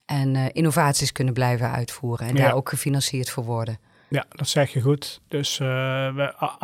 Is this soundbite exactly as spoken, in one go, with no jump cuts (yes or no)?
yes